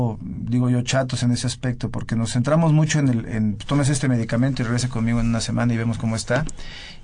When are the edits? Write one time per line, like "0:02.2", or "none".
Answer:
none